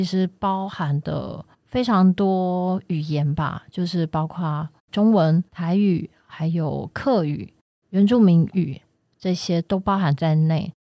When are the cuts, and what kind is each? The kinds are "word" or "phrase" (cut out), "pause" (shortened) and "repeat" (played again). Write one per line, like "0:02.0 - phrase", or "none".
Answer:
0:01.5 - pause
0:04.8 - pause
0:05.5 - pause